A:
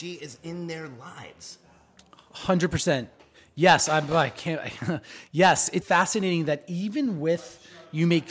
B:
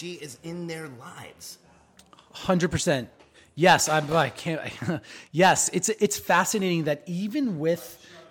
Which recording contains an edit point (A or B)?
A